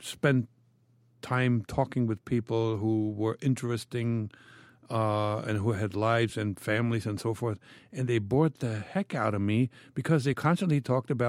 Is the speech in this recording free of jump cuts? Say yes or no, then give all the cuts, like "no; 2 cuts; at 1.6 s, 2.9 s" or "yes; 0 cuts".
yes; 0 cuts